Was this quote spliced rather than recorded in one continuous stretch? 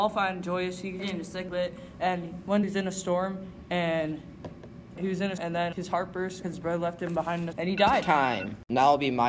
yes; 8 cuts; at 1.0 s, 1.5 s, 2.6 s, 5.0 s, 5.4 s, 5.7 s, 6.4 s, 7.5 s

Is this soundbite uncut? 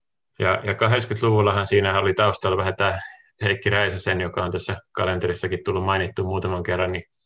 yes; 0 cuts

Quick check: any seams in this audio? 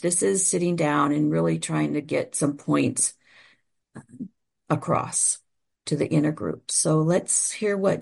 no; 0 cuts

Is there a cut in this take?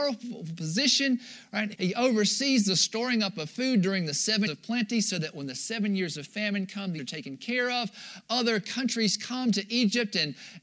yes; 3 cuts; at 1.7 s, 4.5 s, 7.0 s

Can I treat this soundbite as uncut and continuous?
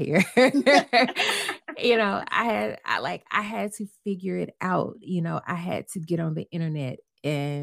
yes; 0 cuts

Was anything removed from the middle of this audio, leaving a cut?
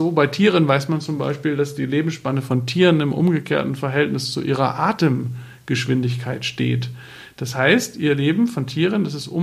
no; 0 cuts

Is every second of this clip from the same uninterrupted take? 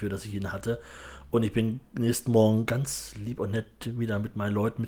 yes; 0 cuts

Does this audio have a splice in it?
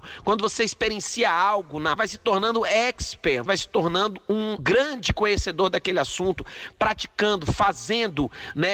yes; 3 cuts; at 2.0 s, 3.5 s, 4.6 s

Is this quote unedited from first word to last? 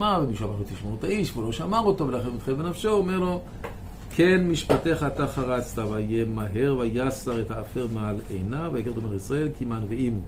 yes; 0 cuts

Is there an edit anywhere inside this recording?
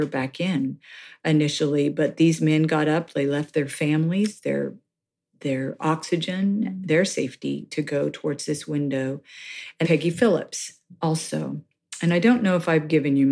yes; 1 cut; at 9.8 s

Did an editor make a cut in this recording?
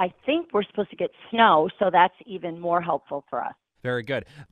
no; 0 cuts

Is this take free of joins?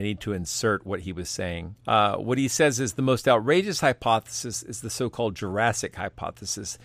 no; 1 cut; at 1.8 s

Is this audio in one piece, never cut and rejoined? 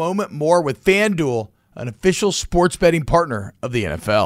yes; 0 cuts

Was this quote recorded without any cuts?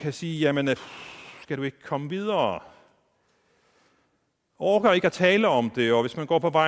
yes; 0 cuts

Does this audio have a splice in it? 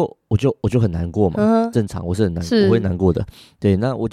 no; 0 cuts

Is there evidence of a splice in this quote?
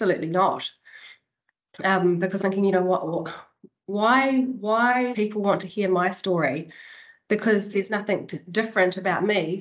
yes; 3 cuts; at 2.4 s, 5.1 s, 7.7 s

